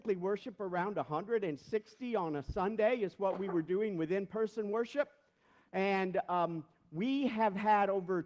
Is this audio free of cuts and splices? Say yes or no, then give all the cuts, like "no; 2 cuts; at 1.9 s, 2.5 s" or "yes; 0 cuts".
yes; 0 cuts